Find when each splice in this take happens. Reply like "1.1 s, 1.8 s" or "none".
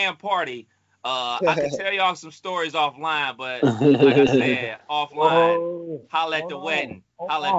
none